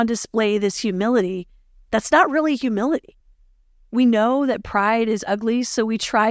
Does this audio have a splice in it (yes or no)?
no